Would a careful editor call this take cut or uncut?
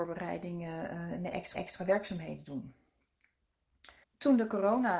cut